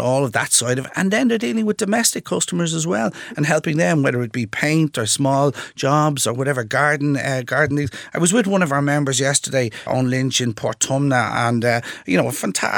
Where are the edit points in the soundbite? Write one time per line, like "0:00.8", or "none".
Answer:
0:09.9